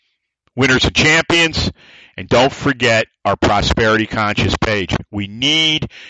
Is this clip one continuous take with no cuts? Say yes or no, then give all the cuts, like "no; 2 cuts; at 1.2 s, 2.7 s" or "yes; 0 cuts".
yes; 0 cuts